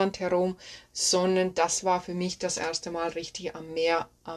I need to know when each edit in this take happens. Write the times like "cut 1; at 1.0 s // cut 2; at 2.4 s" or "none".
none